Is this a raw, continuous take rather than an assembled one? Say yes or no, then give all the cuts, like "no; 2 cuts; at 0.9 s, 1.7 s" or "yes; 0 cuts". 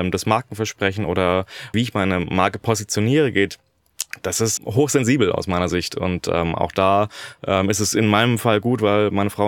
no; 2 cuts; at 1.7 s, 4.6 s